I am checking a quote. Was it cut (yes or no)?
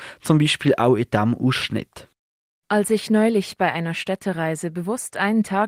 no